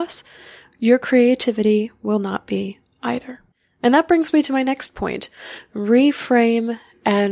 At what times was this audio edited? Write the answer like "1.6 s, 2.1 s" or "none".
3.5 s

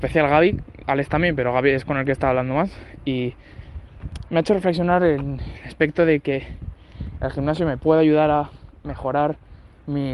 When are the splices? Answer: none

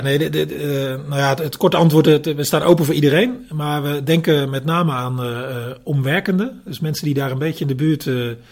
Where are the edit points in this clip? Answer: none

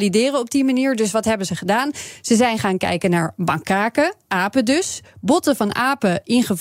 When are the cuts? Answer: none

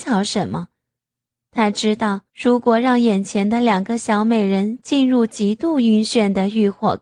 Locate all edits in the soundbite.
2.3 s

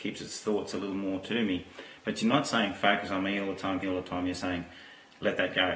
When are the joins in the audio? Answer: 3.8 s

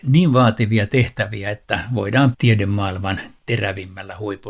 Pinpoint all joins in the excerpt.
2.3 s

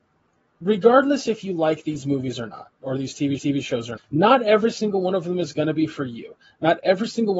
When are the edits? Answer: 3.4 s, 4.0 s

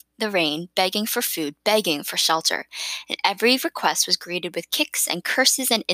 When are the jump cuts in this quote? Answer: none

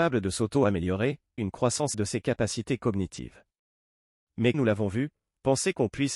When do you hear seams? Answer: 1.4 s, 1.9 s, 4.5 s

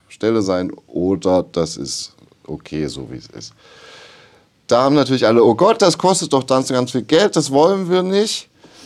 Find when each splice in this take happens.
none

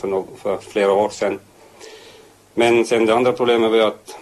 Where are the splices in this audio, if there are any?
none

